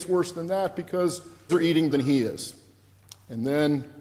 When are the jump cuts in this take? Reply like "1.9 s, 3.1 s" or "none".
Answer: 1.5 s, 1.9 s, 2.9 s